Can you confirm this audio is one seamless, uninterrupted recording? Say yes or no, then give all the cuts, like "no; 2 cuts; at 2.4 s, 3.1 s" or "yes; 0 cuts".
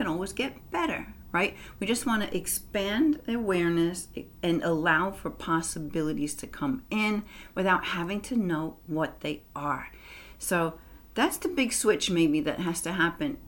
yes; 0 cuts